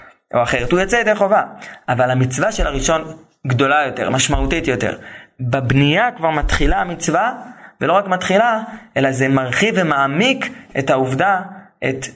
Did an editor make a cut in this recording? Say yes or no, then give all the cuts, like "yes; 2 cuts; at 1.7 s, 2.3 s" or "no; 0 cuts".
no; 0 cuts